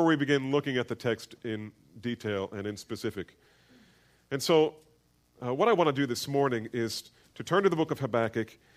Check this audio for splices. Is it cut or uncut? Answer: uncut